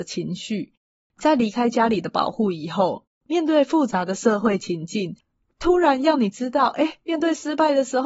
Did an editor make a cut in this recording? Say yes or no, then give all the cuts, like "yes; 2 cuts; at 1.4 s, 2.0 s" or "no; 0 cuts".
no; 0 cuts